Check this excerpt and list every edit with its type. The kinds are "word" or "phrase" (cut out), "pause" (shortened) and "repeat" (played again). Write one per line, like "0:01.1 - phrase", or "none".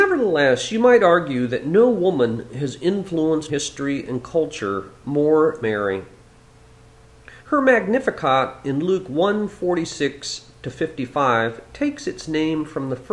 0:03.5 - word
0:05.6 - word
0:07.4 - pause